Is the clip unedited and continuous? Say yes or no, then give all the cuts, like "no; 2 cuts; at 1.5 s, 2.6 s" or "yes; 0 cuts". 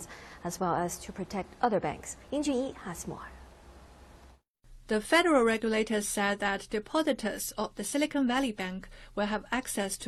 no; 1 cut; at 2.2 s